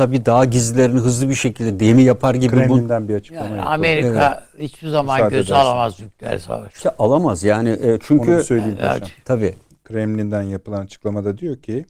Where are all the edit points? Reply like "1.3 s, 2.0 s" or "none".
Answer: none